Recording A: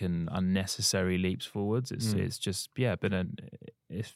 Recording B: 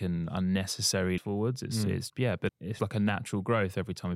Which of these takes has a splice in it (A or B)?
B